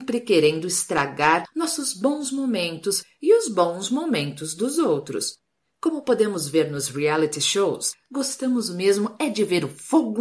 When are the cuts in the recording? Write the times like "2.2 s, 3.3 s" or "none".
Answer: none